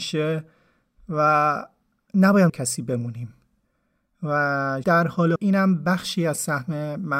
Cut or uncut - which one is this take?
cut